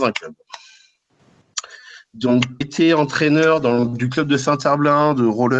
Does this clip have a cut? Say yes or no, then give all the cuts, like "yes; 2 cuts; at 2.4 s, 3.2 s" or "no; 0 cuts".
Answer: yes; 1 cut; at 2.6 s